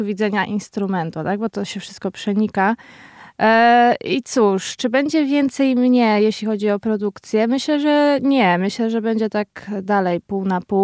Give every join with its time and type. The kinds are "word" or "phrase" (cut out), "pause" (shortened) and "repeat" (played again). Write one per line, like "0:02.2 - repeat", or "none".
0:01.5 - word